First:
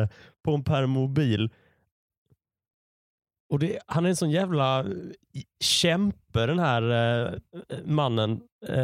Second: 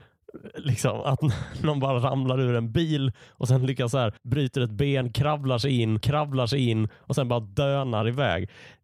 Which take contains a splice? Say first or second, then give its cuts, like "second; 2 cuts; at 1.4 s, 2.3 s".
second; 2 cuts; at 4.2 s, 6.0 s